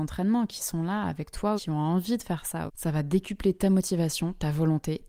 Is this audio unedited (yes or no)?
no